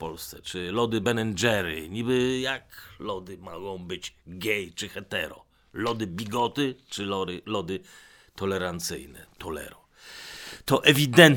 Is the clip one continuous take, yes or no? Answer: yes